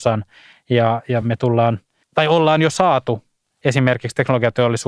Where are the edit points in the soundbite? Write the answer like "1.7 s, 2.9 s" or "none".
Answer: none